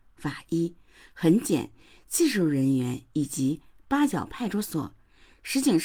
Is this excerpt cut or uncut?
uncut